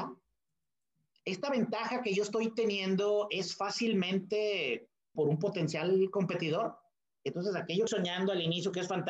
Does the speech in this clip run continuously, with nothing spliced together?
no; 2 cuts; at 5.2 s, 7.9 s

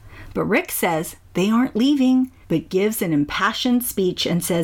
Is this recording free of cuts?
no; 1 cut; at 2.4 s

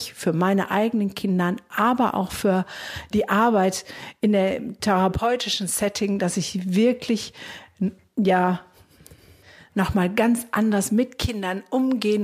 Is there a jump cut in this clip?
no; 0 cuts

